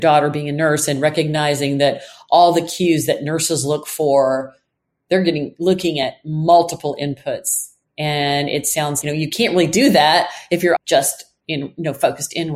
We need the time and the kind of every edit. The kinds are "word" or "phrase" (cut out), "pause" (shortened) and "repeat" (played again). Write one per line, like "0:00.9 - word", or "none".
0:09.0 - word
0:10.8 - word